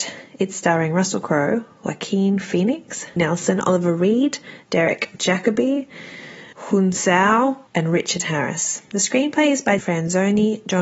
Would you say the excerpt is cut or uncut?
cut